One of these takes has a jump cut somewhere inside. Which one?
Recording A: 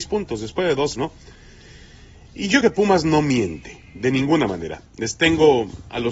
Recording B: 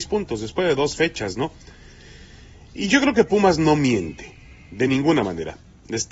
A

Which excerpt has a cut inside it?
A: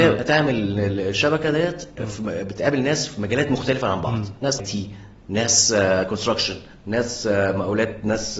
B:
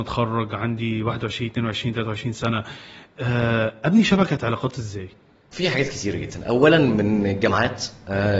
A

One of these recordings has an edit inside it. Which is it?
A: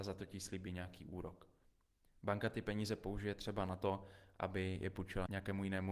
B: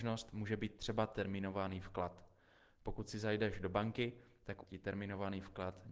B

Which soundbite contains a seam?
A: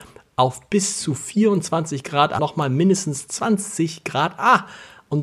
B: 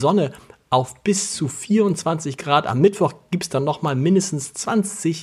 A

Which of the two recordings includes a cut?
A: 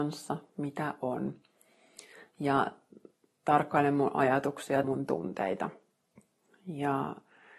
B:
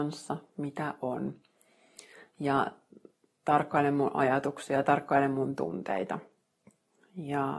A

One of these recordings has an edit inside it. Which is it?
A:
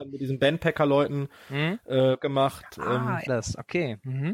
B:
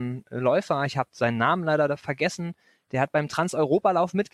A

